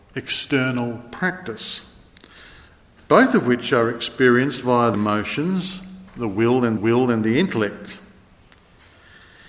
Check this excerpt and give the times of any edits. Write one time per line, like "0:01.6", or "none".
0:04.9
0:06.1
0:06.8